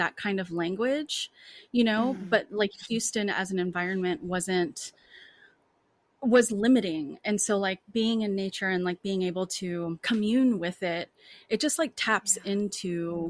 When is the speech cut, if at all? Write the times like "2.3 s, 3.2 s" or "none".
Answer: none